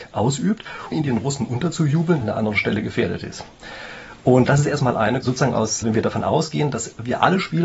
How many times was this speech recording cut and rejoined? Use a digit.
5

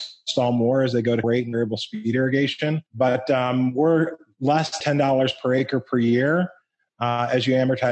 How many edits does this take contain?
3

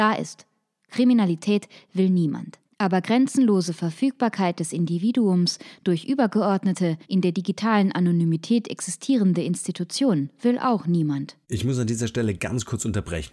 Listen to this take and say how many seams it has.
3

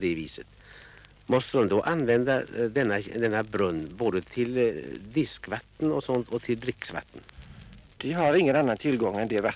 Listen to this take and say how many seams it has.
0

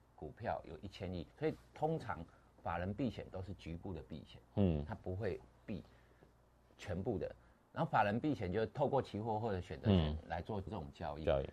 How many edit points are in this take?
1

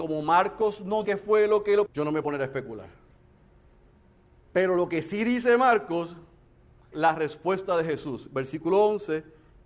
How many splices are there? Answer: 4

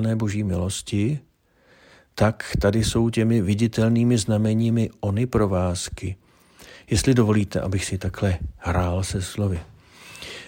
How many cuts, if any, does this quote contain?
0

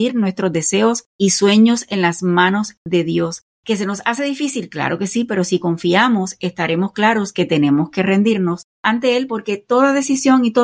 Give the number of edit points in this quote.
3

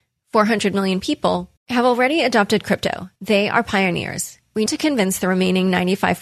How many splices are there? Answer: 3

